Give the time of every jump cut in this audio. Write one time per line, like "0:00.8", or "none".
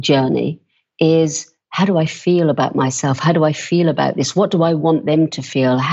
none